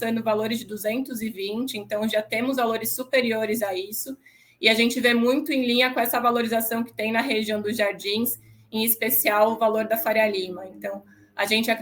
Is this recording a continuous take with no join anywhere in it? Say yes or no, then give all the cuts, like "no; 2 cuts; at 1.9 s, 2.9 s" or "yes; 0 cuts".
yes; 0 cuts